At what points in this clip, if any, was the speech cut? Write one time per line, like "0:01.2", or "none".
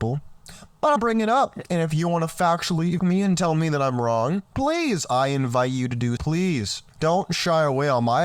0:01.0
0:03.0
0:06.2
0:06.9